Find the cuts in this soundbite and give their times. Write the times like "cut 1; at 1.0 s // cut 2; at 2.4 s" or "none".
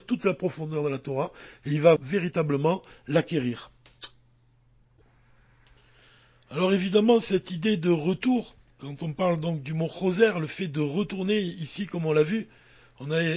cut 1; at 2.0 s